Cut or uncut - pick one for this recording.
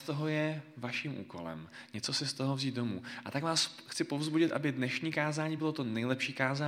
uncut